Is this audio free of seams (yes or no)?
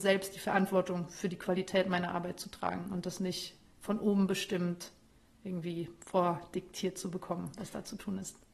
yes